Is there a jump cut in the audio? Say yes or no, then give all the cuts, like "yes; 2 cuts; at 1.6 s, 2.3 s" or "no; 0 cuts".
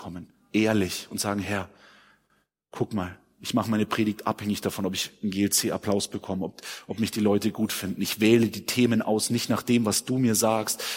no; 0 cuts